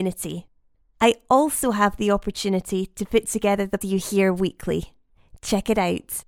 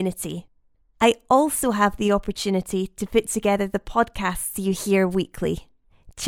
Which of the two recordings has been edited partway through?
first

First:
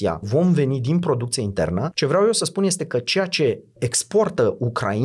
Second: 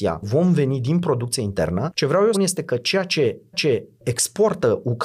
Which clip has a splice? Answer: second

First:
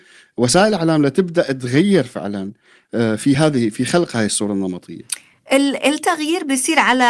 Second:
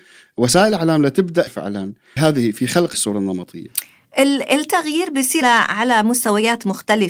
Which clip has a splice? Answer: second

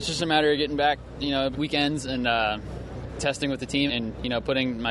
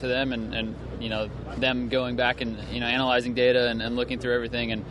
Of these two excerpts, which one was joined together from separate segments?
first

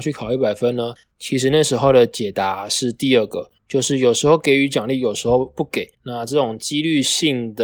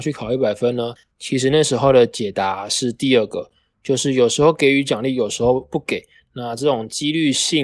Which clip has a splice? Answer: first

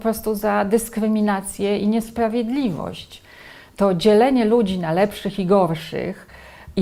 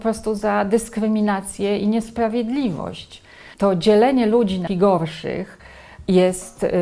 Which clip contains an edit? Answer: second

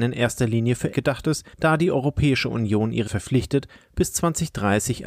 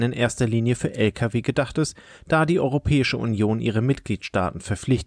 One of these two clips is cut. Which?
first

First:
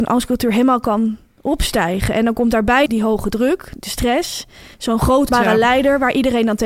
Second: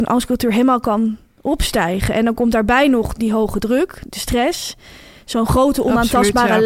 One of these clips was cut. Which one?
first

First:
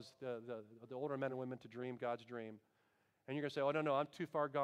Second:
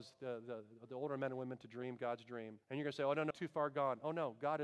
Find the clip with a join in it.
second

